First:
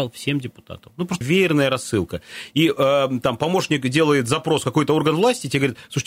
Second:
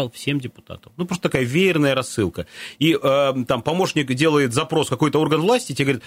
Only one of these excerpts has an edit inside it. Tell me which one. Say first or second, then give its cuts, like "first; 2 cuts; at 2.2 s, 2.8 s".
first; 1 cut; at 1.2 s